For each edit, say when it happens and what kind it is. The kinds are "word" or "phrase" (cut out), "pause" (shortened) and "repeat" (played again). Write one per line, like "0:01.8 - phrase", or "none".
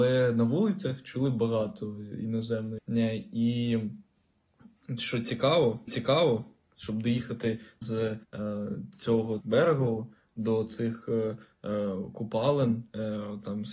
0:02.8 - word
0:05.9 - repeat
0:07.8 - word
0:08.2 - pause
0:09.4 - word